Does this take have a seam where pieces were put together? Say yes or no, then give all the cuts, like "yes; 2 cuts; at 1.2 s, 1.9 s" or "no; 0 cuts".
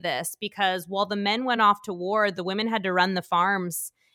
no; 0 cuts